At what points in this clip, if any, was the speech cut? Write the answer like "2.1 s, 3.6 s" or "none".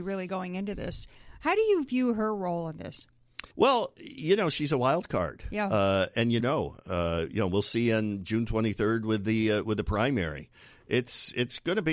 3.5 s, 6.4 s